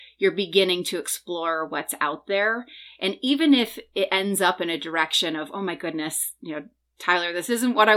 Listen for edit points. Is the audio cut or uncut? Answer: uncut